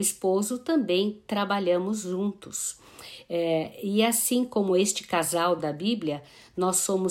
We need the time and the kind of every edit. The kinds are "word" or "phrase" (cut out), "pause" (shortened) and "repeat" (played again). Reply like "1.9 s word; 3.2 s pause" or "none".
none